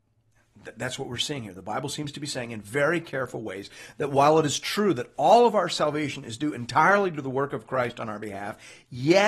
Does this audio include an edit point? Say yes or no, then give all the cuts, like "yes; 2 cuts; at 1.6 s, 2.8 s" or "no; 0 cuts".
no; 0 cuts